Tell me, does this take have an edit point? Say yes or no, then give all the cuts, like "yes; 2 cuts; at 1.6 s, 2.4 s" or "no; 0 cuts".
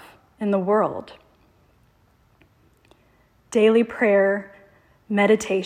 no; 0 cuts